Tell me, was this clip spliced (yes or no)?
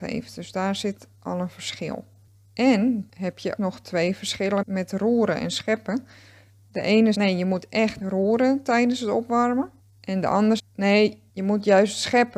yes